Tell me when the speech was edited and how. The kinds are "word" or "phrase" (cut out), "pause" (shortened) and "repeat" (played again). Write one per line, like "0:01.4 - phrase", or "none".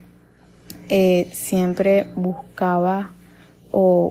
none